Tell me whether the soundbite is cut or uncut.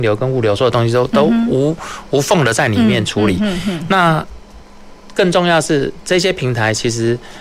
uncut